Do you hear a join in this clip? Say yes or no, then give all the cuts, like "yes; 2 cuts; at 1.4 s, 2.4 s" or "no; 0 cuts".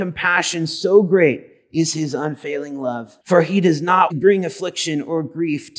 yes; 2 cuts; at 3.2 s, 4.1 s